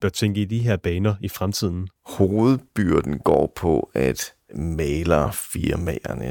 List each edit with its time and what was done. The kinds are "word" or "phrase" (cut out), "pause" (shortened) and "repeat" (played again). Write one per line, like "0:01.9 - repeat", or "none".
0:02.0 - pause